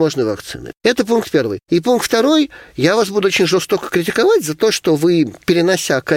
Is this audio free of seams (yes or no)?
yes